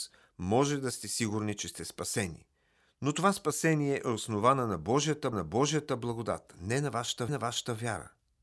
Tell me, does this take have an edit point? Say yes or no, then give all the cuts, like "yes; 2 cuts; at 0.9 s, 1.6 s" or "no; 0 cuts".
yes; 2 cuts; at 5.3 s, 7.3 s